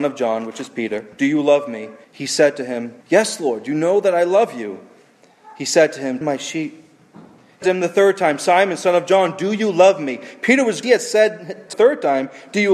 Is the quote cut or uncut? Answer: cut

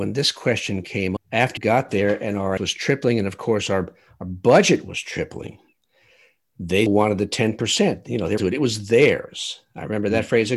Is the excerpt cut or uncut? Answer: cut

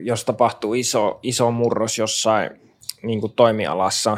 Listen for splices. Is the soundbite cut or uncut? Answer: uncut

